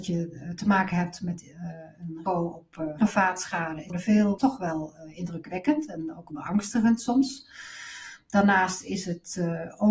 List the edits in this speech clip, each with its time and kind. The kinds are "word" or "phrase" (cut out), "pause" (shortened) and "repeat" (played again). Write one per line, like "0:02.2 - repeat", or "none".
0:02.3 - word
0:03.0 - word
0:03.9 - word
0:04.4 - word
0:06.3 - word